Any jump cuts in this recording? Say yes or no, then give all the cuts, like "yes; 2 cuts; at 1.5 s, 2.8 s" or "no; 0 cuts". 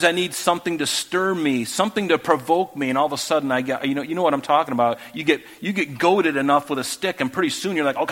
no; 0 cuts